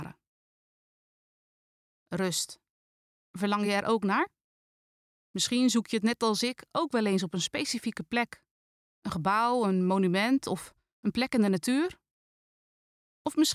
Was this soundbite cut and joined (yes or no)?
no